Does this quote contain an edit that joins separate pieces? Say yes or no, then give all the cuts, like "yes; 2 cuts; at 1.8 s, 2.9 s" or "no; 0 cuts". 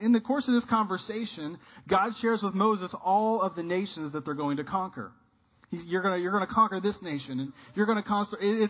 no; 0 cuts